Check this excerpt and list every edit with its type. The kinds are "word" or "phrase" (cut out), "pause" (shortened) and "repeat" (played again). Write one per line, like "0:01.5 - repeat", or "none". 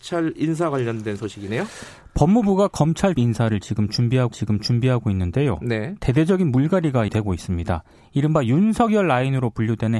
0:03.1 - phrase
0:04.3 - repeat
0:07.1 - word